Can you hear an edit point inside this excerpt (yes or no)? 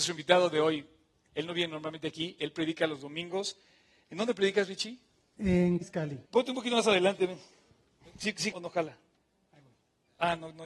yes